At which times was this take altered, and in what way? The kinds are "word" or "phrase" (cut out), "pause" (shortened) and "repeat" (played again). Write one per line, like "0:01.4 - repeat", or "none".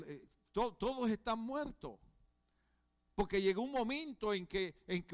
none